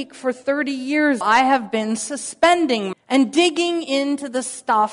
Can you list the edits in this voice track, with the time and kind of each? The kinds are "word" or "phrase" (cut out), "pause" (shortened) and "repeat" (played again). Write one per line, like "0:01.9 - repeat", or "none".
0:01.2 - word
0:02.9 - phrase